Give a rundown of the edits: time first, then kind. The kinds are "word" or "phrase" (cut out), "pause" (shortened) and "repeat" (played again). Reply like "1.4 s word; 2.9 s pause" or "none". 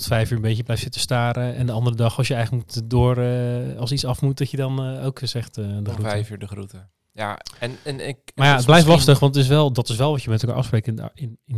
none